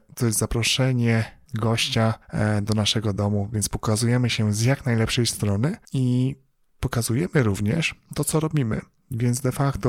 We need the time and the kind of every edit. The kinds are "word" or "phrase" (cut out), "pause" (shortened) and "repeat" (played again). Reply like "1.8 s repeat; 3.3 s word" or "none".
none